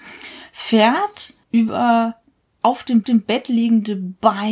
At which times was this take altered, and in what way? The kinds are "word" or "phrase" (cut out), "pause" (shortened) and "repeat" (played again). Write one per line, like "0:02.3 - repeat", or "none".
0:01.4 - pause
0:03.0 - repeat